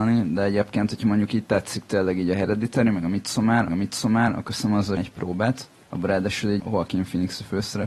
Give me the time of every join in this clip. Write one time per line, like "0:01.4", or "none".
0:03.7
0:05.0
0:06.6